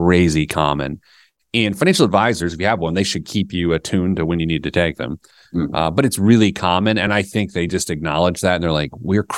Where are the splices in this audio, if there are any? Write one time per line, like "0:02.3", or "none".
none

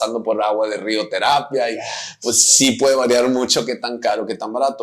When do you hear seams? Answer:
none

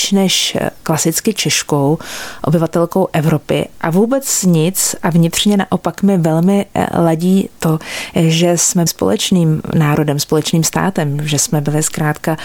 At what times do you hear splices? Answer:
0:08.9

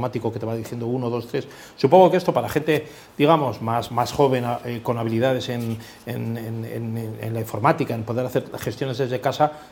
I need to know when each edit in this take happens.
0:03.9

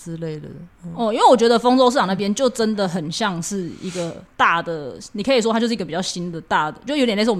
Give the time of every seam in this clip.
0:04.3

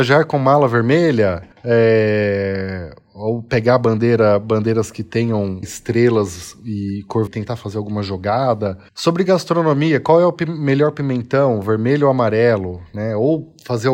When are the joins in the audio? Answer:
0:01.5
0:05.6
0:07.3
0:08.9

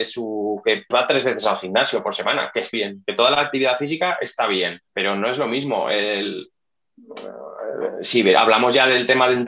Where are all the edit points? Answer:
0:00.9
0:02.7
0:04.9

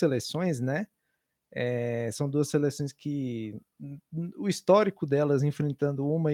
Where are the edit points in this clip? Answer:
none

